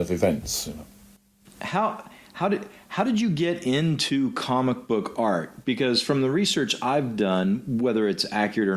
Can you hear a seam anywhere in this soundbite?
no; 0 cuts

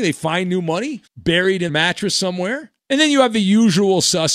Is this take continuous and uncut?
no; 3 cuts; at 1.1 s, 1.7 s, 2.8 s

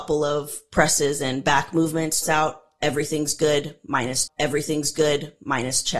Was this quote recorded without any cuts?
no; 2 cuts; at 2.2 s, 4.3 s

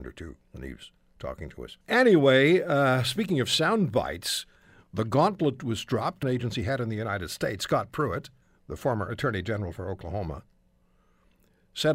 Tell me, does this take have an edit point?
yes; 3 cuts; at 1.8 s, 6.2 s, 8.4 s

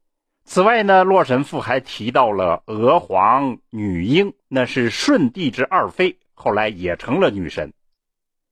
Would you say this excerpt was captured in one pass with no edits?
no; 1 cut; at 4.4 s

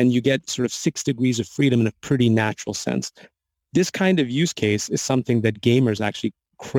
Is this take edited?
no; 0 cuts

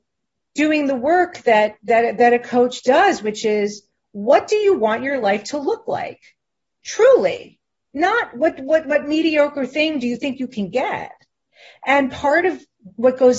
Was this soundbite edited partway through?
no; 0 cuts

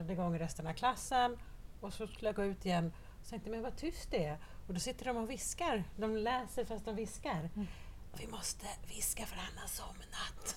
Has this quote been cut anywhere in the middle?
no; 0 cuts

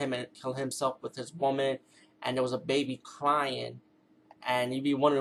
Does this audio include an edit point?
no; 0 cuts

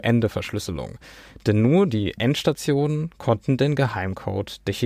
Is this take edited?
no; 0 cuts

